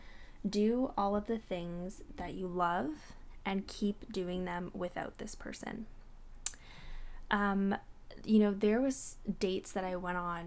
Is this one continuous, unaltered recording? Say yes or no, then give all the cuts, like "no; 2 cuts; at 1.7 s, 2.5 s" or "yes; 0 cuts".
yes; 0 cuts